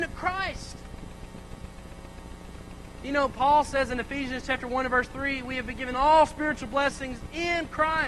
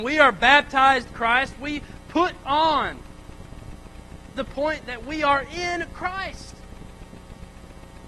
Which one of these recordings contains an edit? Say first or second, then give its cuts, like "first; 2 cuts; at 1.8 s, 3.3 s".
second; 4 cuts; at 1.1 s, 2.4 s, 4.3 s, 4.8 s